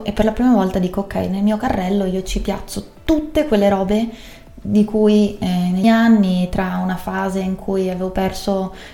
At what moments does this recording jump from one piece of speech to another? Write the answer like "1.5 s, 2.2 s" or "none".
5.8 s